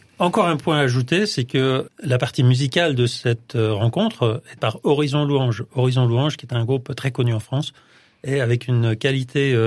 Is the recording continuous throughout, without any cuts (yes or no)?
no